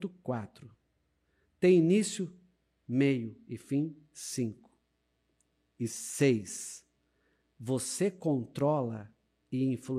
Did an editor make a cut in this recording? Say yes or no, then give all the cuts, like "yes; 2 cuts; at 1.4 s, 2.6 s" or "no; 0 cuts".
no; 0 cuts